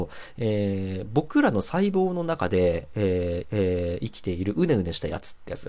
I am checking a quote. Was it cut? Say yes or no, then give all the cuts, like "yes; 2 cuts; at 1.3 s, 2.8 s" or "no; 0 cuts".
yes; 1 cut; at 3.4 s